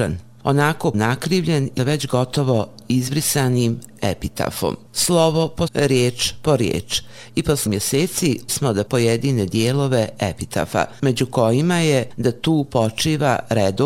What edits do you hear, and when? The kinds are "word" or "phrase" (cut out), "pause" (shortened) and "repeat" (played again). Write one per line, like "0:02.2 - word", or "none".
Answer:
0:00.9 - word
0:01.8 - word
0:05.7 - word
0:07.7 - word
0:08.5 - word
0:08.9 - word